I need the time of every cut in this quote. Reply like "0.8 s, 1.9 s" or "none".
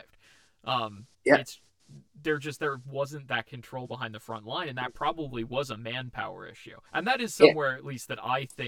1.1 s, 6.9 s